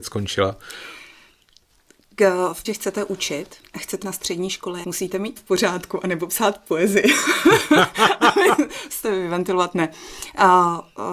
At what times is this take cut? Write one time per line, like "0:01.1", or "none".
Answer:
0:02.6
0:03.6
0:04.0
0:04.8
0:05.4
0:09.0